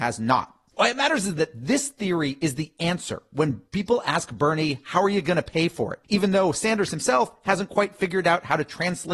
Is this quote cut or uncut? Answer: uncut